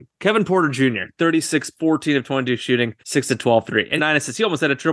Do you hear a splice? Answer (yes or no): yes